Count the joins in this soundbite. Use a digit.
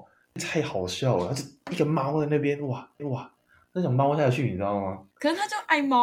2